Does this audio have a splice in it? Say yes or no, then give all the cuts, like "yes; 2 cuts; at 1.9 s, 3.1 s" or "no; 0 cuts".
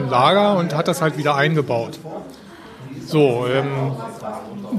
no; 0 cuts